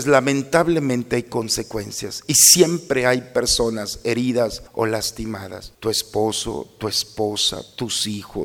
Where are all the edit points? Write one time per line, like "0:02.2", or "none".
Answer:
0:04.7
0:05.7